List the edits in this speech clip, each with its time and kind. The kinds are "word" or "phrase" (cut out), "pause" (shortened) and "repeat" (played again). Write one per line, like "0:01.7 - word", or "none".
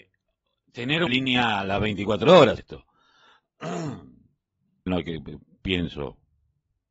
0:01.1 - word
0:02.6 - word
0:04.9 - phrase